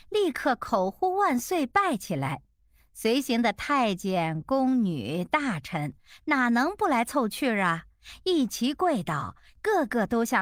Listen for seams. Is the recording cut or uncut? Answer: uncut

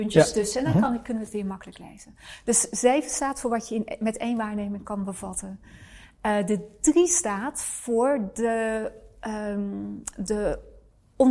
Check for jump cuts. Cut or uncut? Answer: uncut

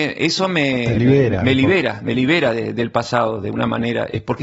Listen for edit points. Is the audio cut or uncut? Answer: uncut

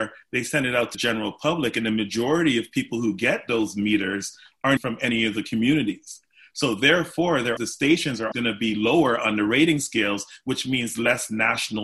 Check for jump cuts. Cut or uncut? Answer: cut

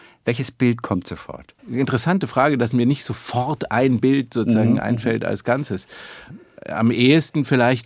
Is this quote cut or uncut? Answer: cut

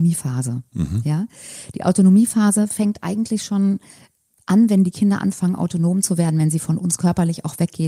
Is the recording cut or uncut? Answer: uncut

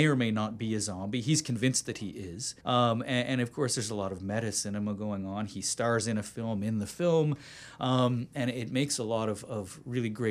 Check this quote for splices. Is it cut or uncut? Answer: cut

